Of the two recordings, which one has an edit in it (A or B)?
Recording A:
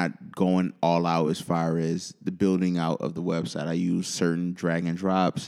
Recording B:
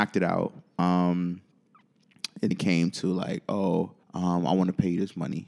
B